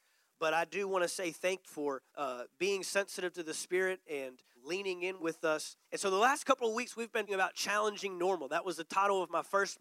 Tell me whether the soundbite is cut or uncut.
cut